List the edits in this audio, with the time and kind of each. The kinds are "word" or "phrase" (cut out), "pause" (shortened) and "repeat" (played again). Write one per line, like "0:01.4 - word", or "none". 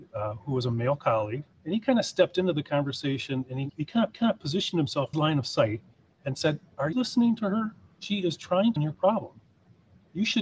0:01.5 - pause
0:03.7 - word
0:04.1 - repeat
0:05.1 - phrase
0:05.9 - pause
0:06.9 - word
0:08.8 - phrase